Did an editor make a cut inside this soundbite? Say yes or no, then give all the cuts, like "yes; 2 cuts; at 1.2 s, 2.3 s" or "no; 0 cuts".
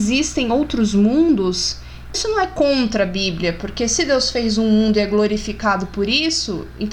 yes; 1 cut; at 2.1 s